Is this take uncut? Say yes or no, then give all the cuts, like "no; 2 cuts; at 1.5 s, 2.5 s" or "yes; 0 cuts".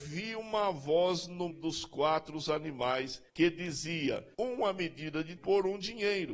no; 4 cuts; at 1.5 s, 3.3 s, 4.3 s, 5.4 s